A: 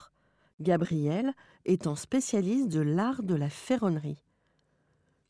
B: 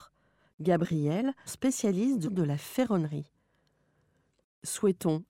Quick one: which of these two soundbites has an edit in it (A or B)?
B